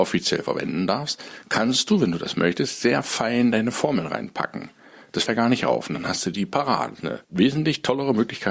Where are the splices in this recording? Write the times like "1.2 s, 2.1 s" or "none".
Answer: 5.3 s, 7.2 s